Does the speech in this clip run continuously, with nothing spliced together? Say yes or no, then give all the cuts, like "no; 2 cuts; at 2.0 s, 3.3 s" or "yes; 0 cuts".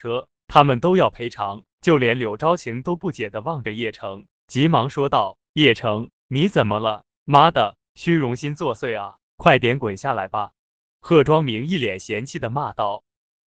no; 2 cuts; at 1.7 s, 7.1 s